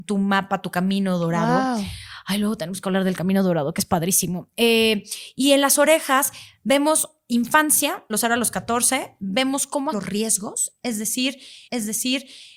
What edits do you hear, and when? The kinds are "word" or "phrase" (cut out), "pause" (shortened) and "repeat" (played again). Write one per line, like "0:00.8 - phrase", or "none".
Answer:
0:08.1 - word
0:09.9 - word
0:11.7 - repeat